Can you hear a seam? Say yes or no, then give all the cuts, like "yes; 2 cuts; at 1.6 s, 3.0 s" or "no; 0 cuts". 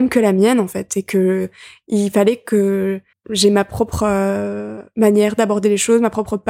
yes; 1 cut; at 3.1 s